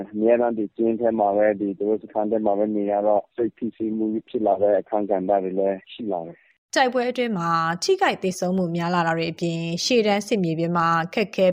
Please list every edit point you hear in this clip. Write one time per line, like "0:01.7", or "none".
none